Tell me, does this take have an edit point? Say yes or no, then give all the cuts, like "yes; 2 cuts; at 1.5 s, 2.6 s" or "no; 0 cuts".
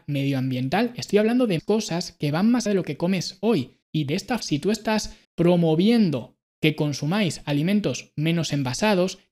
yes; 5 cuts; at 1.6 s, 2.7 s, 3.8 s, 4.4 s, 5.2 s